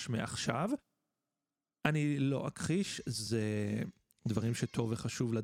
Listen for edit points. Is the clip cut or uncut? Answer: uncut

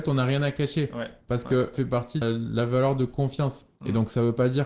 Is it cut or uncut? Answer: cut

